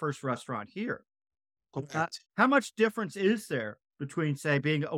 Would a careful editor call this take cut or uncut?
cut